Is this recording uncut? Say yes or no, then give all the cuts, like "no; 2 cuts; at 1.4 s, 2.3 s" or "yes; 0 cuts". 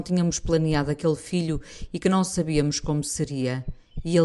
yes; 0 cuts